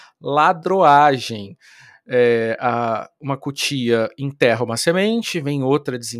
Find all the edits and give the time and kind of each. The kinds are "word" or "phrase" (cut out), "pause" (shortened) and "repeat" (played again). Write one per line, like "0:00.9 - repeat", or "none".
none